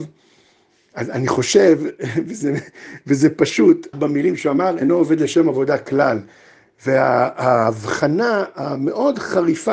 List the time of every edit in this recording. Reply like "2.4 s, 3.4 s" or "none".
3.9 s